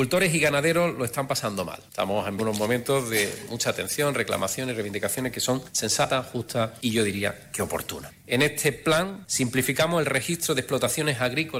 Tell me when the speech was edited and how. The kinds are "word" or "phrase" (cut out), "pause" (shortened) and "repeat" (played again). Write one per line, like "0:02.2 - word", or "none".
0:02.4 - word